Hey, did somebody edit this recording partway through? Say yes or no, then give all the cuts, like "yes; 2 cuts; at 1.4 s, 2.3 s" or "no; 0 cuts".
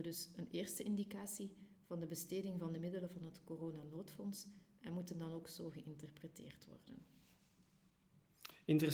no; 0 cuts